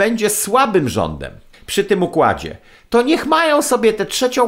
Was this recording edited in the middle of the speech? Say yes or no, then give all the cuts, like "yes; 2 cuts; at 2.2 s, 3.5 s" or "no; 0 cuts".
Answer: yes; 1 cut; at 1.5 s